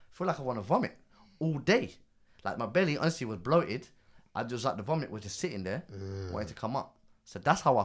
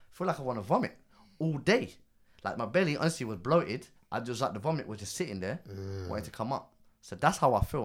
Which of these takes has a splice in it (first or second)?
second